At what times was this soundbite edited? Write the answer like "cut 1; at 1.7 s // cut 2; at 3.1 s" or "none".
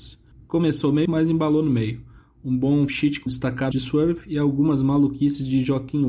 cut 1; at 1.1 s // cut 2; at 2.9 s // cut 3; at 3.3 s // cut 4; at 3.7 s